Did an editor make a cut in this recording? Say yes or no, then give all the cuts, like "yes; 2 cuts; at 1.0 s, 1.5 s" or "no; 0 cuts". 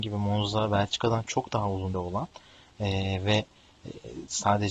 yes; 1 cut; at 1.9 s